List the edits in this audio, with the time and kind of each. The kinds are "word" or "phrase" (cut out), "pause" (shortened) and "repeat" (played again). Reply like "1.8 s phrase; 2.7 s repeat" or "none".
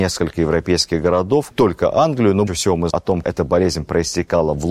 1.5 s word; 2.5 s word; 2.9 s word; 3.2 s word